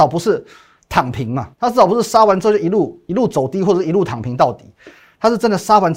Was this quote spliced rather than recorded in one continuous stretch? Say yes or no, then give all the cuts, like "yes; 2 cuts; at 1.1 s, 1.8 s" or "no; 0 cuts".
yes; 1 cut; at 1.5 s